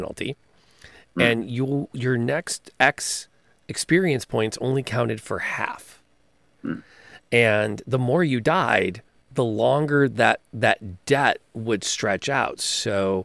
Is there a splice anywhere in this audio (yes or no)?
no